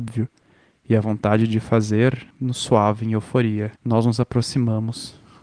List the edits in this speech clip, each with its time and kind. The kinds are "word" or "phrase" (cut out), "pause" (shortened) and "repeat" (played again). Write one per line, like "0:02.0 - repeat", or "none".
0:02.3 - pause
0:03.8 - pause